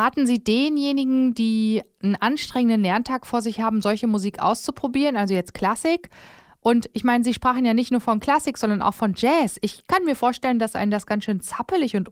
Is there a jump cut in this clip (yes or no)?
no